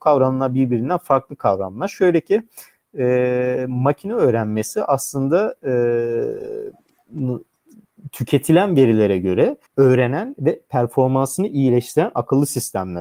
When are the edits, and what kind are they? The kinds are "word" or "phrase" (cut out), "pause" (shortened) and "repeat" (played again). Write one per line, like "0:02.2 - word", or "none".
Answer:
0:09.7 - pause